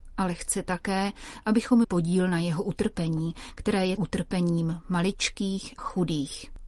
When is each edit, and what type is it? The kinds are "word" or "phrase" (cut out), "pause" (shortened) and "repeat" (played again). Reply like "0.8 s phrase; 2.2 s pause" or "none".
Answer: 1.8 s word; 4.0 s word; 5.8 s word